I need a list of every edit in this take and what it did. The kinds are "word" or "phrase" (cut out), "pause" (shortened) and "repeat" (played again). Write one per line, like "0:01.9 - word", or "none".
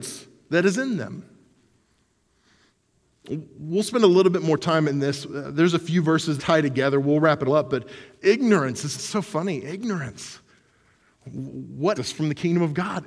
0:06.4 - word
0:07.5 - word
0:08.9 - word
0:12.0 - word